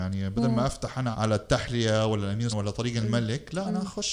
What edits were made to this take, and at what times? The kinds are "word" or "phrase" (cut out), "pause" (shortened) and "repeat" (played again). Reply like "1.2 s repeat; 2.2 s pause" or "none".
1.1 s word; 2.5 s word